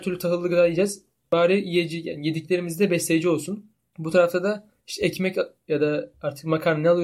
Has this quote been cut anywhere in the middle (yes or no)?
no